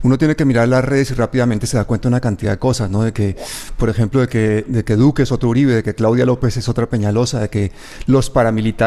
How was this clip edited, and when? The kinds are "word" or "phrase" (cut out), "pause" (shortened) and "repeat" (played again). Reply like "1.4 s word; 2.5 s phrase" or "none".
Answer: none

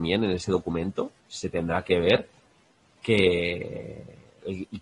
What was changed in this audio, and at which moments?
1.2 s pause

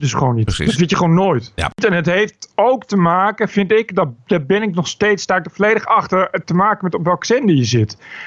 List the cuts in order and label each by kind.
none

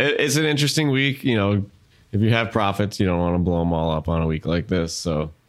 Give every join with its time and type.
none

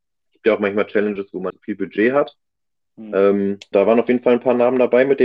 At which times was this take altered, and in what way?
1.5 s word; 3.7 s word

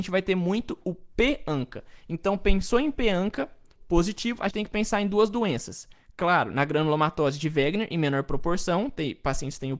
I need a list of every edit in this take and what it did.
4.5 s word

